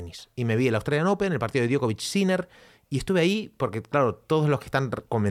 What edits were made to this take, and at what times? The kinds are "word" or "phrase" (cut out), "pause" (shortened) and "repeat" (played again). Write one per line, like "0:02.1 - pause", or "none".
none